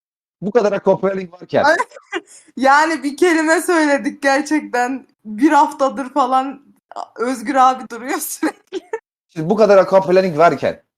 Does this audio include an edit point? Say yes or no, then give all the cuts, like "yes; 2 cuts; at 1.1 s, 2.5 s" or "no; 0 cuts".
yes; 2 cuts; at 5.1 s, 7.9 s